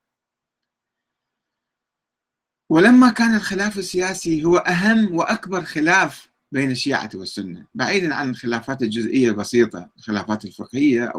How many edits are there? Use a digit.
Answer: 0